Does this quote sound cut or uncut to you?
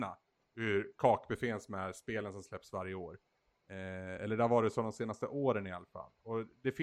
uncut